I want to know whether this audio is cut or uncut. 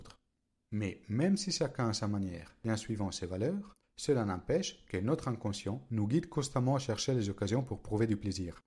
uncut